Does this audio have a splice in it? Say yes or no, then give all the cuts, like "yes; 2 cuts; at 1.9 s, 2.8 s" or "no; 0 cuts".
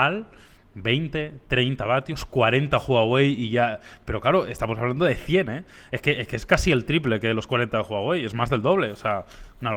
no; 0 cuts